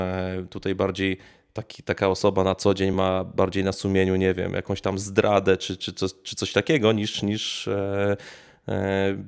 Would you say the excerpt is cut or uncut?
uncut